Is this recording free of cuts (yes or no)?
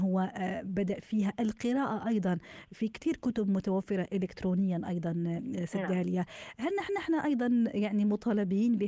no